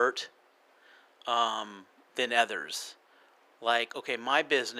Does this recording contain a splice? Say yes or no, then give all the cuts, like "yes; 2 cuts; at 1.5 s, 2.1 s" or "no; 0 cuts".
no; 0 cuts